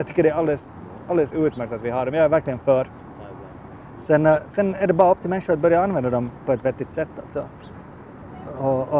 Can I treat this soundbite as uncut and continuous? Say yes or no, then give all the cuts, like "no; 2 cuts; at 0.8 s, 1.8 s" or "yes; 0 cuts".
yes; 0 cuts